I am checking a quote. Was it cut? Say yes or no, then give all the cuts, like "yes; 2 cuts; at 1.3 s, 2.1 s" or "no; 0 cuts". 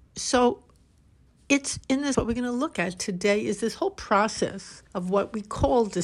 yes; 2 cuts; at 2.1 s, 4.9 s